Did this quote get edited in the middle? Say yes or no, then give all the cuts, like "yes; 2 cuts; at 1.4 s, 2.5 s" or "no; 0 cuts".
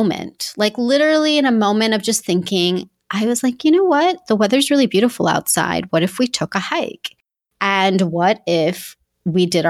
no; 0 cuts